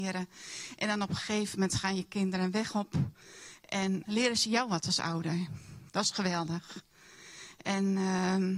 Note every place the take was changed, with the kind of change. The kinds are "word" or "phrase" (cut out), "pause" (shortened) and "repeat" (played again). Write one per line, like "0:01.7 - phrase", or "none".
0:04.1 - word